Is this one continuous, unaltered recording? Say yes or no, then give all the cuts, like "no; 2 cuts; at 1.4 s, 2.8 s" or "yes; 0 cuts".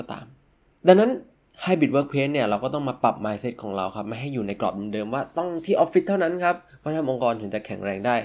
yes; 0 cuts